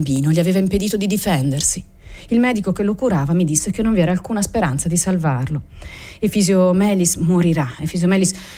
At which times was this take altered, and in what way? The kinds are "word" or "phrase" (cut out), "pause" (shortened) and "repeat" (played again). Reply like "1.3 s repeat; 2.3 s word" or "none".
none